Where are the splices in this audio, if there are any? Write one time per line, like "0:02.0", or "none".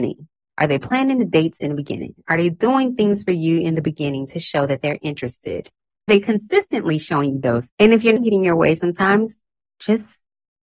0:06.1
0:07.7
0:08.2